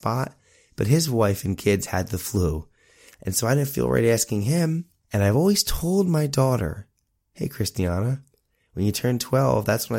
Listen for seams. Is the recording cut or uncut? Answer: uncut